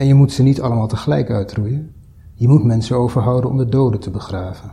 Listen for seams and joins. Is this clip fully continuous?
yes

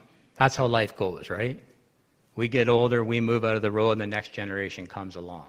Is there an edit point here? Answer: no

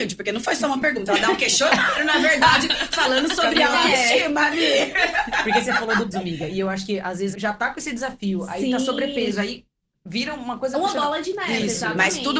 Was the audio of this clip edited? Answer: yes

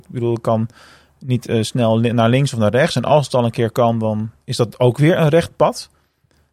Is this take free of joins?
yes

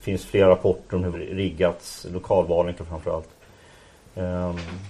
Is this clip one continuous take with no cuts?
no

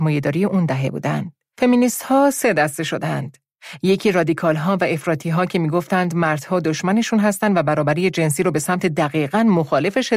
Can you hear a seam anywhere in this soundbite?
no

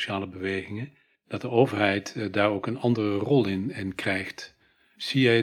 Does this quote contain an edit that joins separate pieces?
no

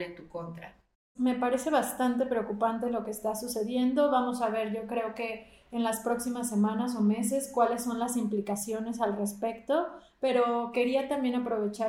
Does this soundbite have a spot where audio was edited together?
yes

